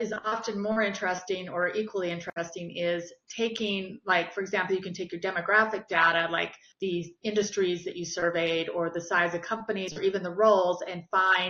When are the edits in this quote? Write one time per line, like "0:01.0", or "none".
0:06.7